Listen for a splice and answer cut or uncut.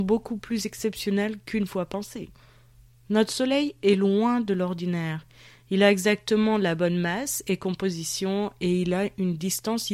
uncut